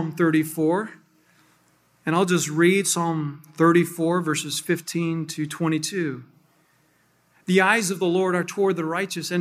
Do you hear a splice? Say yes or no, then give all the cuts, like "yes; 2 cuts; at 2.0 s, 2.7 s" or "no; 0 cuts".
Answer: no; 0 cuts